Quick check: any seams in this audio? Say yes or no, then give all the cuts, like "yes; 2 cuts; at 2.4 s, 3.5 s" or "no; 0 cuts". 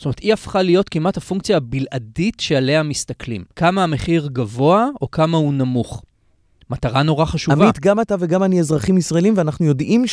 yes; 1 cut; at 3.5 s